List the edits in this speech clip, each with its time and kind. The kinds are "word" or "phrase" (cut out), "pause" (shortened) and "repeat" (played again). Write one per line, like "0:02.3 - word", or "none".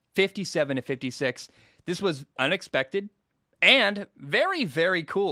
0:02.4 - phrase